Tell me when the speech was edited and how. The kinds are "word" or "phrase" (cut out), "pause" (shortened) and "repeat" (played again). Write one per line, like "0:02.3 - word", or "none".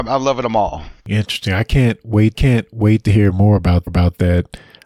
0:01.0 - pause
0:02.3 - repeat
0:03.9 - repeat

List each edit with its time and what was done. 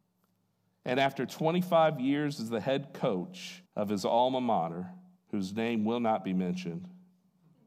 0:03.7 - pause
0:05.2 - pause

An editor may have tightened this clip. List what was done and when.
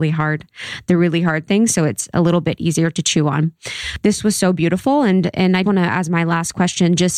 0:05.6 - word

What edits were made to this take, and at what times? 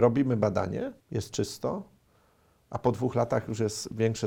0:01.0 - pause

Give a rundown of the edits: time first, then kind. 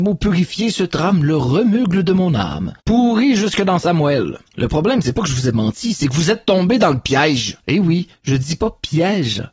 0:02.8 - pause
0:04.5 - pause
0:07.6 - pause

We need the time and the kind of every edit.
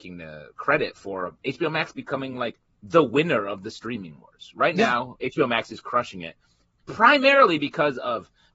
none

